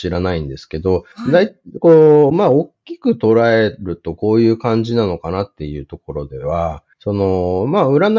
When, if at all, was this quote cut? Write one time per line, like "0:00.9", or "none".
0:01.1
0:06.9